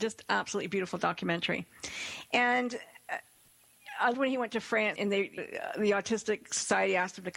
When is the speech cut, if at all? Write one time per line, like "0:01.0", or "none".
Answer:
0:04.1
0:05.0
0:05.4